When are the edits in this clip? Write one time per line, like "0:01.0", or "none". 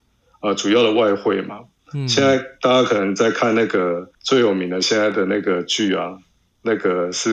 none

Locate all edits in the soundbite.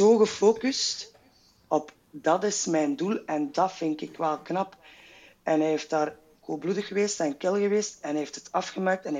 none

